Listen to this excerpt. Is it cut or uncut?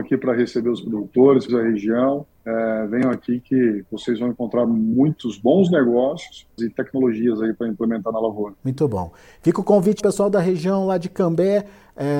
cut